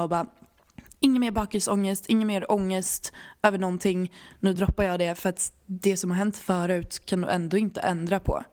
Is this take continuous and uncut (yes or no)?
yes